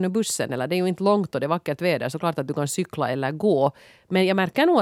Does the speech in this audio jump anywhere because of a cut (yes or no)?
no